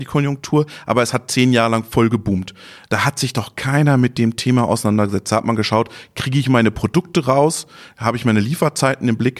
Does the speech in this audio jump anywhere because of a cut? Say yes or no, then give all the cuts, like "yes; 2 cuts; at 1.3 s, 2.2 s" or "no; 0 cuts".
no; 0 cuts